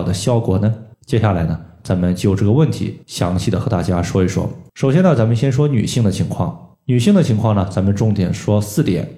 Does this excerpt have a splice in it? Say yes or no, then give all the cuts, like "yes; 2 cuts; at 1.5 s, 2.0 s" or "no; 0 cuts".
yes; 4 cuts; at 0.9 s, 3.0 s, 4.7 s, 6.7 s